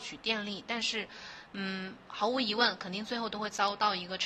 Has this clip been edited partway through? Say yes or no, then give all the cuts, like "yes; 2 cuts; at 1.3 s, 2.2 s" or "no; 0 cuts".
no; 0 cuts